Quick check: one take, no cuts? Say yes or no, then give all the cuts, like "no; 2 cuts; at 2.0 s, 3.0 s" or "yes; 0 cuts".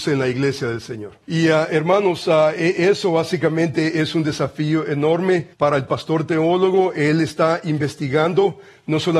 no; 2 cuts; at 1.2 s, 5.5 s